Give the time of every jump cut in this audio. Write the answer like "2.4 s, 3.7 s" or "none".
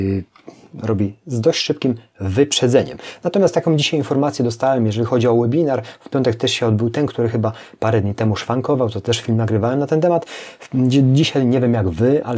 none